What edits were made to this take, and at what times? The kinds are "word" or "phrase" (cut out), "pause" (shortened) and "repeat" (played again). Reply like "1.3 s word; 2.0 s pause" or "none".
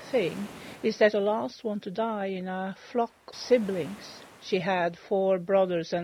1.1 s phrase; 3.3 s word